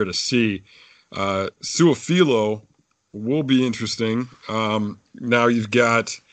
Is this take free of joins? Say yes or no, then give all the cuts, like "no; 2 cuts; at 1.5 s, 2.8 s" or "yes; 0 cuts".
no; 1 cut; at 1.5 s